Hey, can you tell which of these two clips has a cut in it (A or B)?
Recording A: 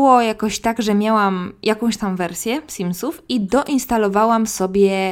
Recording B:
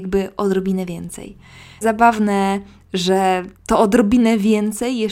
B